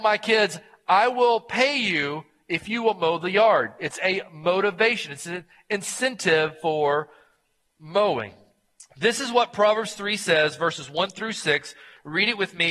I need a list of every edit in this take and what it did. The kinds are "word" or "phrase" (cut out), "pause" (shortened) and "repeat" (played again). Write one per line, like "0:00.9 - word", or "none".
none